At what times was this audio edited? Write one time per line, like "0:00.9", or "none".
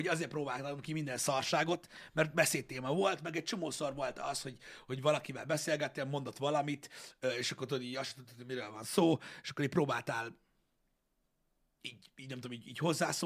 none